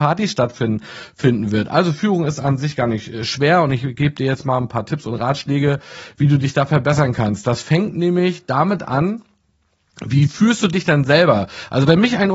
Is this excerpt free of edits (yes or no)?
yes